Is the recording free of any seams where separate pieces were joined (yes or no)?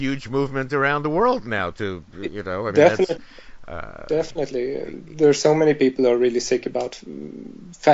yes